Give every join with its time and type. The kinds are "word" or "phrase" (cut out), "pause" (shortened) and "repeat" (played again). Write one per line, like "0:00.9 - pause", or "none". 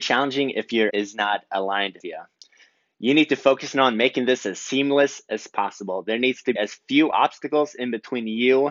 0:00.9 - word
0:02.0 - word
0:06.6 - word